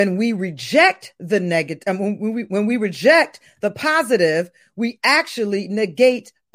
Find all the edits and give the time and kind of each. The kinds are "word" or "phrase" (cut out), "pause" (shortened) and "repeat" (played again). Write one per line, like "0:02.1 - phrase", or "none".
none